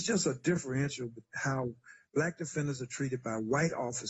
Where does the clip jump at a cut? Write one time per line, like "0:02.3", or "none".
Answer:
none